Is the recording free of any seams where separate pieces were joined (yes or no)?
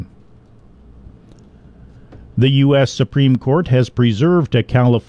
yes